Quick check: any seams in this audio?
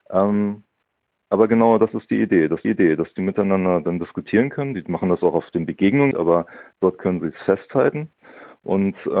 yes; 2 cuts; at 2.6 s, 6.1 s

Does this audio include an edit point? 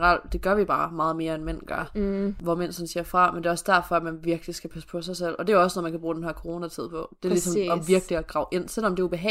no; 0 cuts

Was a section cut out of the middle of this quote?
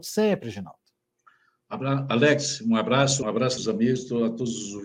yes; 2 cuts; at 3.2 s, 3.6 s

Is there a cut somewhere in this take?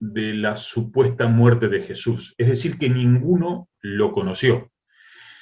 no; 0 cuts

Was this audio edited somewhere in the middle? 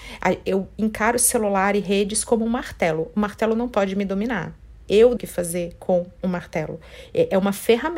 yes; 1 cut; at 5.2 s

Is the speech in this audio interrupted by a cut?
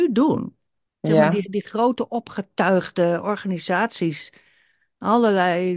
no; 0 cuts

